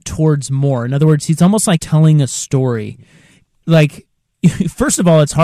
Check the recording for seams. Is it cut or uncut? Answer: cut